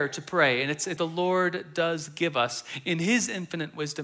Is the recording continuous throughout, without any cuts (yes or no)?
no